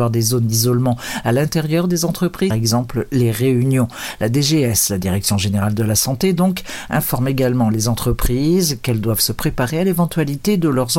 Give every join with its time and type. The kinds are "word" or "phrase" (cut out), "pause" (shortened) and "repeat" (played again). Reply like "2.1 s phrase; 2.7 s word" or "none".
2.5 s phrase